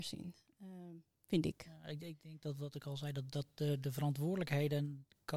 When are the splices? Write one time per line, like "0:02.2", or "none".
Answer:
none